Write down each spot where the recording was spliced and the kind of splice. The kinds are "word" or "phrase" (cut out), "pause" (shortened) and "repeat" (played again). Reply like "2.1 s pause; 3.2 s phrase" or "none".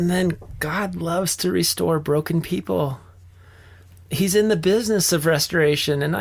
none

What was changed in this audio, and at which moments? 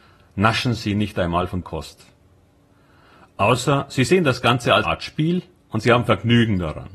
1.6 s word; 4.8 s word

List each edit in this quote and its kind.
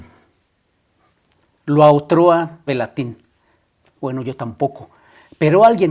2.7 s phrase

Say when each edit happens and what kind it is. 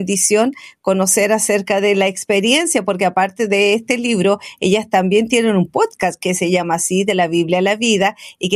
none

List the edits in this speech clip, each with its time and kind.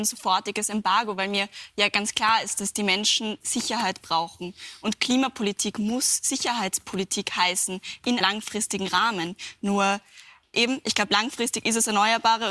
8.2 s word; 10.5 s word

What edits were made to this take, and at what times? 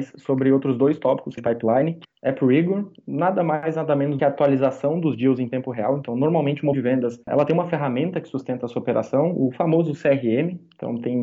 1.4 s phrase; 2.0 s word; 4.2 s phrase; 6.7 s word; 7.2 s pause

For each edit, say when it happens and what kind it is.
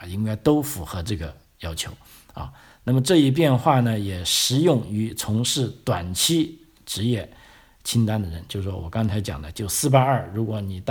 none

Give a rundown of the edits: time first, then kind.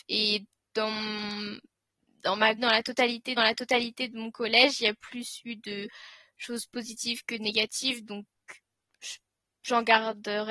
2.6 s word; 3.4 s repeat

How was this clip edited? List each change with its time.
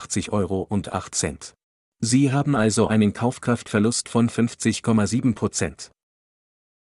1.6 s pause

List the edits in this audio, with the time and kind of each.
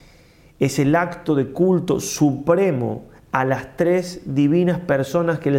none

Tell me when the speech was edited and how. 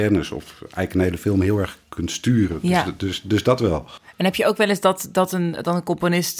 none

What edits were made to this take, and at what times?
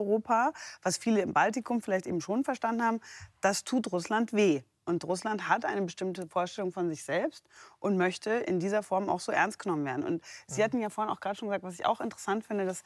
none

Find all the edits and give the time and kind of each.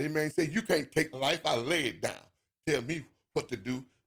1.1 s word

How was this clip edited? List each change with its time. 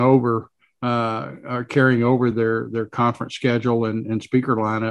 none

